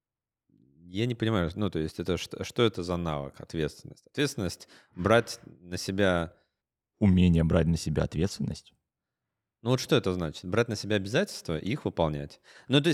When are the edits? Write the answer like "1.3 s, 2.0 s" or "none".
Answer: none